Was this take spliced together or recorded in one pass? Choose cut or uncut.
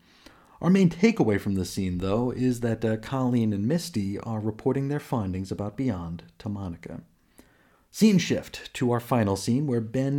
uncut